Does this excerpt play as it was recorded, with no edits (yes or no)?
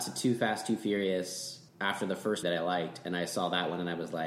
no